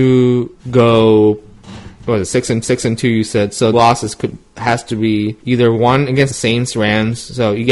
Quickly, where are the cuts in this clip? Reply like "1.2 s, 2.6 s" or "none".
2.6 s, 3.7 s, 5.4 s, 6.3 s